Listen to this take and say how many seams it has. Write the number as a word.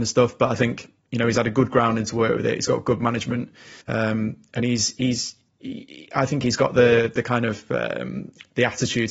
one